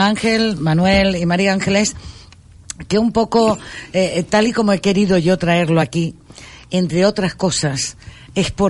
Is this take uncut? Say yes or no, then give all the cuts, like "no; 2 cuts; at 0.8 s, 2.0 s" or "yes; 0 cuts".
yes; 0 cuts